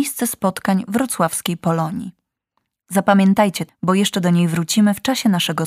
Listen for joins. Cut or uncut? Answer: cut